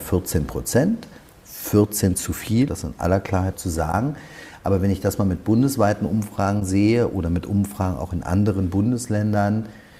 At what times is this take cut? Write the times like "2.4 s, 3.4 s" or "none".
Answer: 2.1 s, 2.7 s, 3.5 s